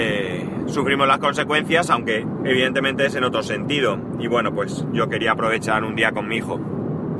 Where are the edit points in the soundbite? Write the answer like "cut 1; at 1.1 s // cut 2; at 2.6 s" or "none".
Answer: none